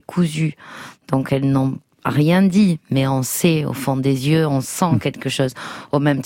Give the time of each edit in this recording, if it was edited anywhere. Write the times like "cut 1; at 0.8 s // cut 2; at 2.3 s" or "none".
none